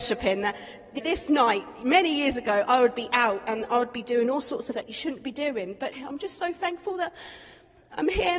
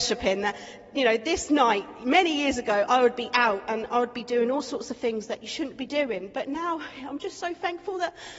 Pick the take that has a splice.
first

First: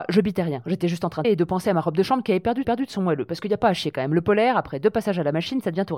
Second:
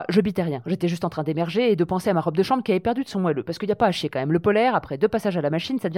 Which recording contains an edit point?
first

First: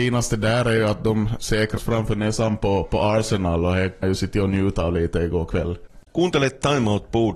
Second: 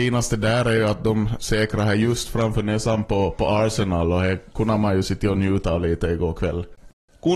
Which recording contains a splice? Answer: first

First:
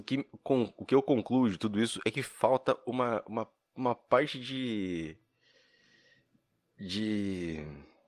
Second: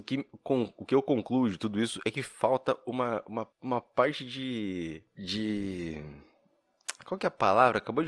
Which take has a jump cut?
second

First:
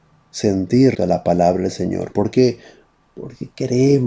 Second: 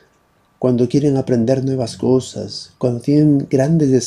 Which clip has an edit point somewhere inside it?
first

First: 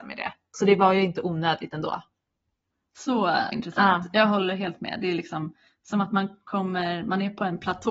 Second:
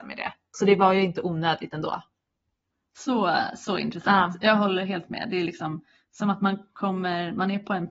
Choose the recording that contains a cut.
first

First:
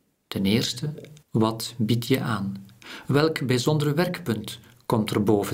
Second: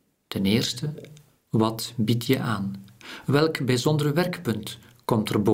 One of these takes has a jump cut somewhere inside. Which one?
first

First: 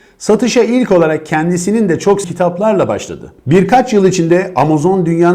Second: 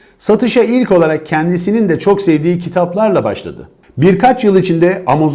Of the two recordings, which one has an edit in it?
first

